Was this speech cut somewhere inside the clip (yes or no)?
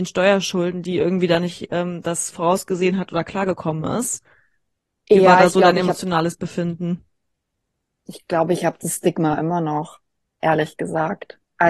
no